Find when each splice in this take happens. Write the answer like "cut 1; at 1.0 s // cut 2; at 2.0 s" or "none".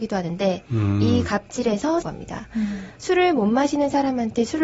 cut 1; at 2.0 s